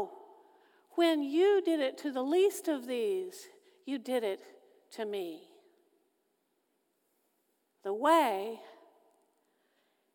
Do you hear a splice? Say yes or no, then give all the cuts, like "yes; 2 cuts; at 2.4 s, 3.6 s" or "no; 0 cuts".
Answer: no; 0 cuts